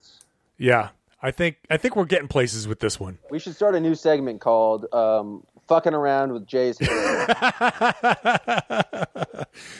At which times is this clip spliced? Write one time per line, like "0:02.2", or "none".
none